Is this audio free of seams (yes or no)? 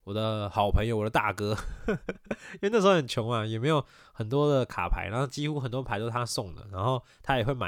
yes